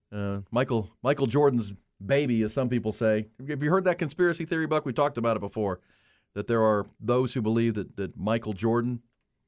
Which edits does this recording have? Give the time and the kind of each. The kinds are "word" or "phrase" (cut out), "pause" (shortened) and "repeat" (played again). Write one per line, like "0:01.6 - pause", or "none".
none